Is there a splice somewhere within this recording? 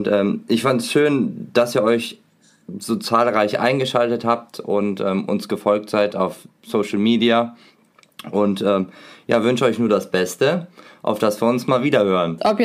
no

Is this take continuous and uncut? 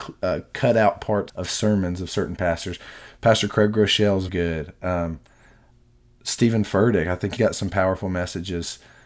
no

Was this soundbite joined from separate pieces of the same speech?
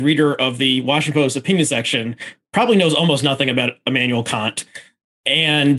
no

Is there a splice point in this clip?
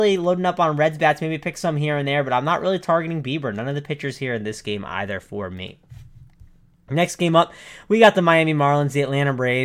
no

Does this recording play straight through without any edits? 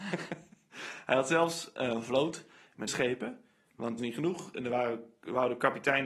no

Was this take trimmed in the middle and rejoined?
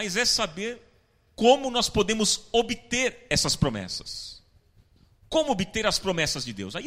no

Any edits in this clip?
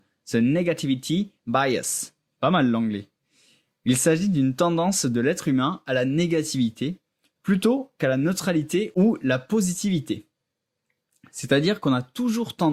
no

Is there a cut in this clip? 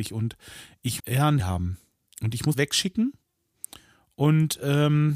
yes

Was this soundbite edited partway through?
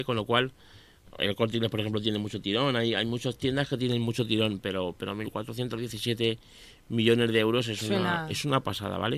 no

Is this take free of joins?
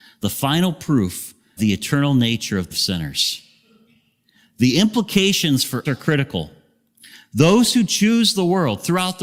no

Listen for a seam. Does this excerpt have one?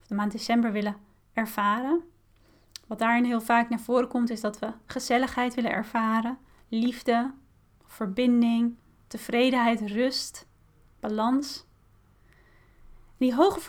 no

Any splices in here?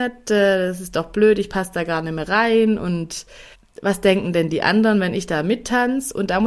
yes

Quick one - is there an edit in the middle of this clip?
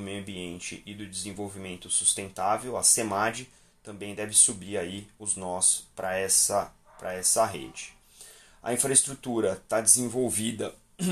no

